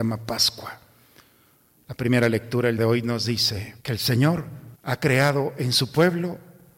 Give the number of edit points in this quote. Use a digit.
3